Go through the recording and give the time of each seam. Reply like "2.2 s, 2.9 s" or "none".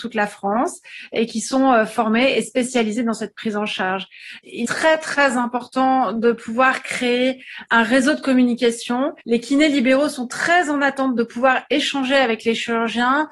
4.6 s, 7.7 s, 9.2 s